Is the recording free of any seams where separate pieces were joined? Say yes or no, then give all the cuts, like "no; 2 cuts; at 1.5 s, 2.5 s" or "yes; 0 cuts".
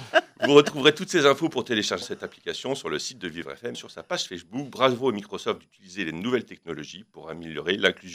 no; 2 cuts; at 2.0 s, 3.7 s